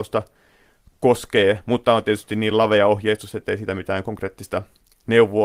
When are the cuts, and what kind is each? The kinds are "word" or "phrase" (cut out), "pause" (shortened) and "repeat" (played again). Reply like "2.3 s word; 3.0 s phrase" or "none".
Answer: none